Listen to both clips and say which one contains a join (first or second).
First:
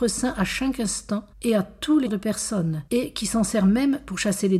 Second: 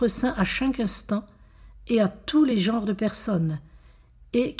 first